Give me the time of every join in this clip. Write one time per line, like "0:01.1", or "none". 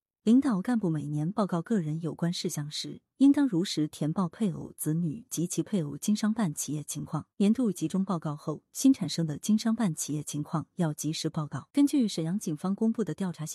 0:07.3
0:11.7